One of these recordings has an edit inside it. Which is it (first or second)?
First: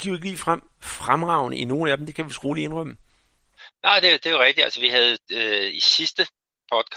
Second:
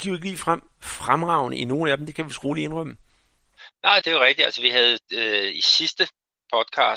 second